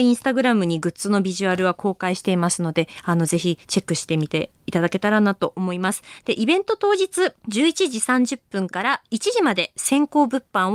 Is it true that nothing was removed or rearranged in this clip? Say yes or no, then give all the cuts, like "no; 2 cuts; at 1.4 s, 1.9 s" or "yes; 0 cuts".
no; 1 cut; at 7.4 s